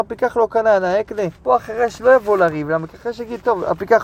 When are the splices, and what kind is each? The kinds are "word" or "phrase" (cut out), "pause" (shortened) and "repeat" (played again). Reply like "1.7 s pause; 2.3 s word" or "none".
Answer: 1.4 s pause